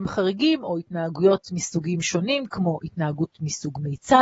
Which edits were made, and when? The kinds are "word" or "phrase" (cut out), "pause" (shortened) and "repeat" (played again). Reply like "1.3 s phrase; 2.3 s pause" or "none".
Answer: none